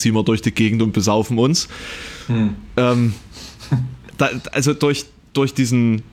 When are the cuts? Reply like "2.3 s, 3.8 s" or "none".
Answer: none